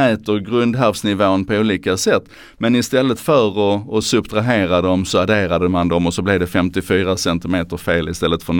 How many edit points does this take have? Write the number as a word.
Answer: zero